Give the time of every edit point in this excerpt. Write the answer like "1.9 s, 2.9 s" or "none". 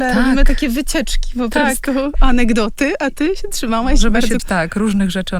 4.4 s